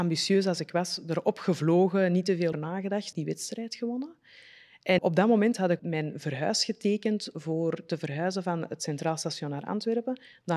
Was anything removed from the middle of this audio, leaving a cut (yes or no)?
yes